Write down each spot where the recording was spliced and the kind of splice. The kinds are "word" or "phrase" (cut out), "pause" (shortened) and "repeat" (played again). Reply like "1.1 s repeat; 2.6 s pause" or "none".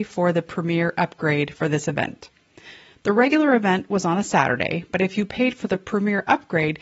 none